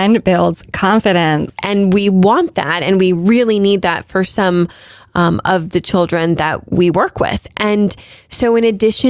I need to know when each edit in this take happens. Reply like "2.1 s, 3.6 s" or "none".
none